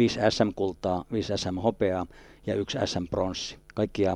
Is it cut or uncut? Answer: uncut